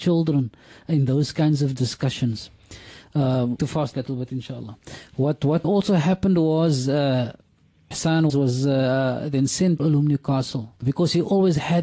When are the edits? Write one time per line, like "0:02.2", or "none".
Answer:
0:03.6
0:03.9
0:05.6
0:07.9
0:08.3
0:09.8
0:10.8